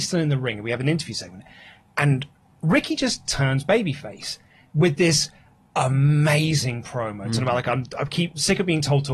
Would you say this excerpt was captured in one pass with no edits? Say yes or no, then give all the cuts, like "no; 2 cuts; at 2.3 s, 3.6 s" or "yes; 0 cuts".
yes; 0 cuts